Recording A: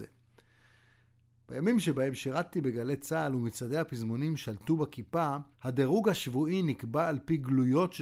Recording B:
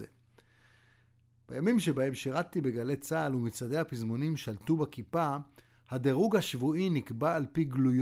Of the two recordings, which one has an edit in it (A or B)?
A